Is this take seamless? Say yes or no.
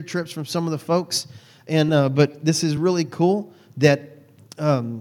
yes